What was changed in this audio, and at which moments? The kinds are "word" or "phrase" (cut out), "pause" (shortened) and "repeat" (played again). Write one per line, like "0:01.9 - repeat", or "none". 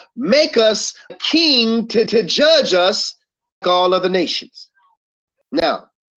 0:01.1 - word
0:02.1 - repeat
0:03.6 - word